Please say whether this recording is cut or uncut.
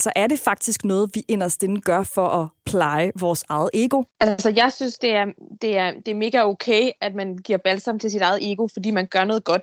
cut